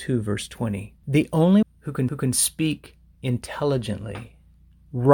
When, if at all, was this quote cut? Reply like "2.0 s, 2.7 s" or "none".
1.0 s, 1.6 s, 2.1 s